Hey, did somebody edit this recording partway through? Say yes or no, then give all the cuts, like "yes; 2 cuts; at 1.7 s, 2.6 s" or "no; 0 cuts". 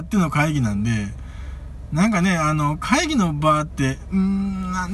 no; 0 cuts